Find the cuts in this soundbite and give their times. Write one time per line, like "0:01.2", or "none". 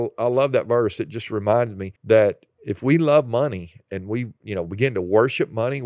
0:02.0
0:04.4

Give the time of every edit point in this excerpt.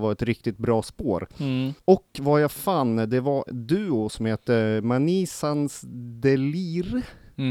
0:01.8
0:03.5

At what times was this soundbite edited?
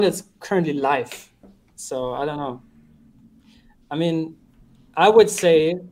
none

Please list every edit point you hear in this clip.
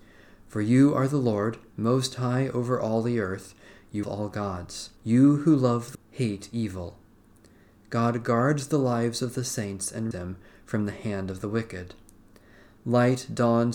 0:04.0
0:05.0
0:05.9
0:10.1

